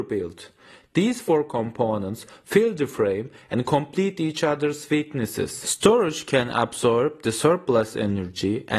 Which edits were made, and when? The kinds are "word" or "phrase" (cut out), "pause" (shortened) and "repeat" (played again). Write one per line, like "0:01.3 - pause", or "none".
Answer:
none

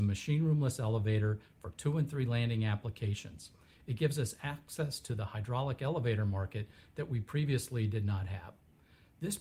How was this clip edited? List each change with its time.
none

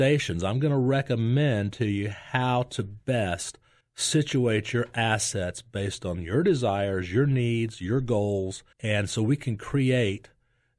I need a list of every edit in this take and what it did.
0:03.8 - pause
0:08.7 - pause

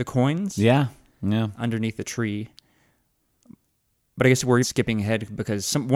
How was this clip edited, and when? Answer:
0:04.6 - word

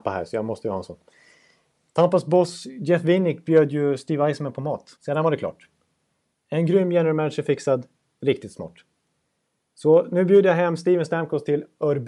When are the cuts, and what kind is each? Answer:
0:05.0 - pause

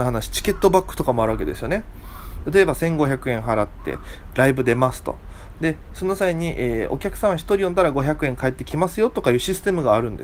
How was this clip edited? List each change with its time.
none

